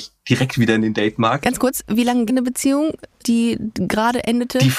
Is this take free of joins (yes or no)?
no